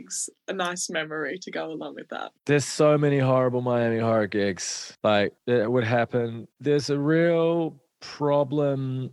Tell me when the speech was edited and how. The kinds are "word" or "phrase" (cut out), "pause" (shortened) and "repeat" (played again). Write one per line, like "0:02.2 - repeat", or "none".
none